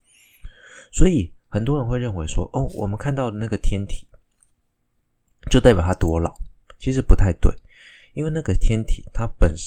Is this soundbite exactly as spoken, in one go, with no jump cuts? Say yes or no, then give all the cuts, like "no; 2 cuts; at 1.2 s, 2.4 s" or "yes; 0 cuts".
yes; 0 cuts